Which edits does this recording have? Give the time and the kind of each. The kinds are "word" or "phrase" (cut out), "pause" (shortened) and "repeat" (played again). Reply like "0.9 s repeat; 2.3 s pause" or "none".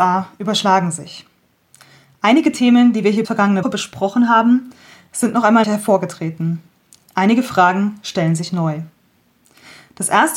3.2 s word; 3.6 s word; 5.6 s word